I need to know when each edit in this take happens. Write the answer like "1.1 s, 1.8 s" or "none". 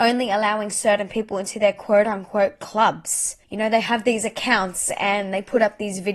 3.4 s